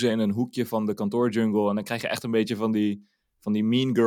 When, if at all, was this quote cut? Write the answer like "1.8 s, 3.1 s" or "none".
none